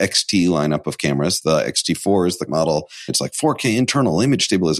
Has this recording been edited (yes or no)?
yes